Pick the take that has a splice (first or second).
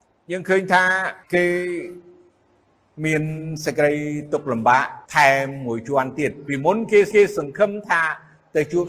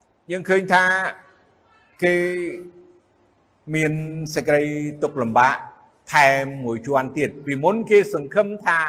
first